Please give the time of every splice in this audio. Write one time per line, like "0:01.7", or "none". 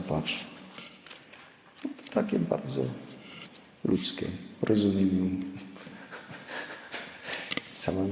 none